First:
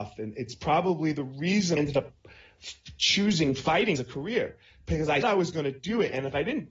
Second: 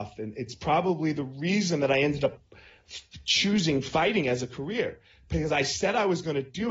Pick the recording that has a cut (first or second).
first